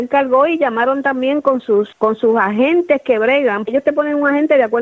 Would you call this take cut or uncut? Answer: cut